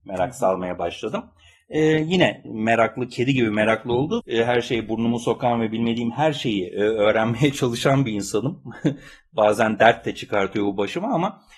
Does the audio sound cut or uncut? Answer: cut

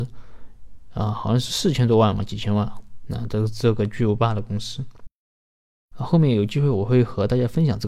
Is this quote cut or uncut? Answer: uncut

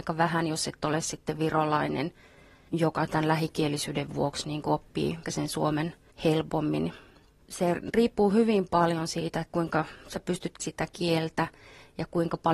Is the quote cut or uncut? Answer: cut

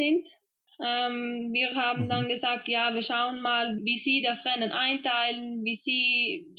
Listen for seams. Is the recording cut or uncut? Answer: cut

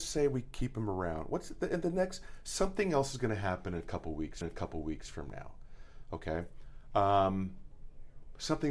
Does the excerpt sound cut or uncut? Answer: cut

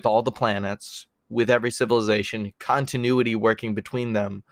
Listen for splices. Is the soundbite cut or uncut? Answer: uncut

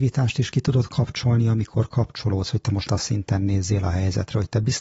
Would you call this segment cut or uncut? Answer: cut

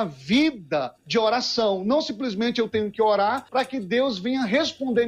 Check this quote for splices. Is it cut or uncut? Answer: cut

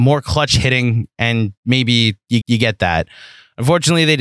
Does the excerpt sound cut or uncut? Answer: cut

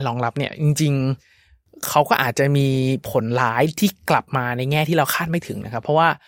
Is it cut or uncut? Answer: cut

